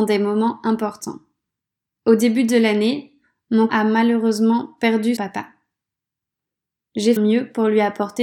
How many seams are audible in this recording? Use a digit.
4